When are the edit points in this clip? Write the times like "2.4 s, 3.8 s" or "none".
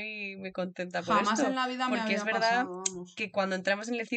none